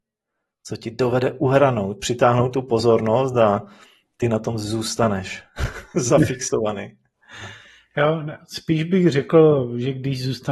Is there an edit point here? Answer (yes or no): no